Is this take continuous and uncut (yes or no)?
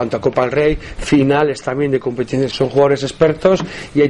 no